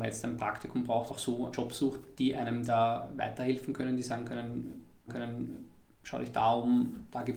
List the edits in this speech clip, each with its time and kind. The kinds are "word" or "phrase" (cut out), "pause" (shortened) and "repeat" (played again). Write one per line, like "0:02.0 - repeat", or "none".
0:01.1 - word
0:01.5 - phrase
0:05.1 - repeat